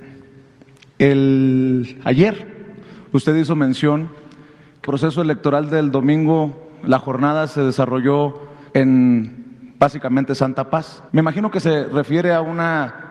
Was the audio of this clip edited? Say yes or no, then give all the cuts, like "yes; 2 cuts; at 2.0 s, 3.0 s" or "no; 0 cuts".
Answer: yes; 3 cuts; at 4.8 s, 8.7 s, 11.1 s